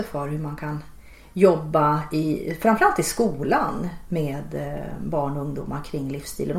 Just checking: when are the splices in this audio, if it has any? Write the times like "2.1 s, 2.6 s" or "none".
none